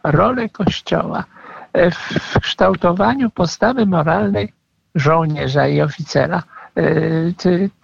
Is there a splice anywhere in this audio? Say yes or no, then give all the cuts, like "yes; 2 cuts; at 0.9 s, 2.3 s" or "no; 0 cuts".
no; 0 cuts